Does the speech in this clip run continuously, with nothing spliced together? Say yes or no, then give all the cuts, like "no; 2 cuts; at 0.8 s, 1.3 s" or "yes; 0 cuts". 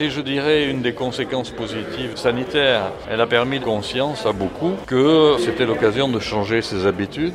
no; 2 cuts; at 2.1 s, 3.6 s